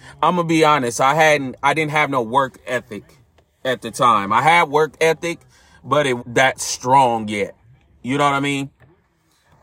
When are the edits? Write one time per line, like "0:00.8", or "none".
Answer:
0:06.2